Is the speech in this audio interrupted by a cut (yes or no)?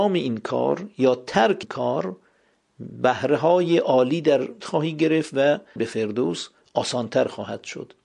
yes